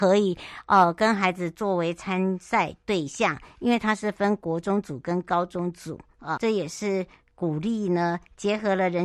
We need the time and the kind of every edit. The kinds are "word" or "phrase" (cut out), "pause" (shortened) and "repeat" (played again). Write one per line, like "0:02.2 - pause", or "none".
0:06.4 - word